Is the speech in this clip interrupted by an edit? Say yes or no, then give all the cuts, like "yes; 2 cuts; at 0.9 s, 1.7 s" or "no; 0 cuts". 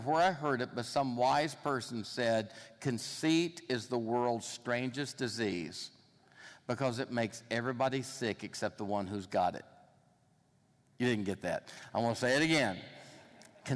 yes; 1 cut; at 10.7 s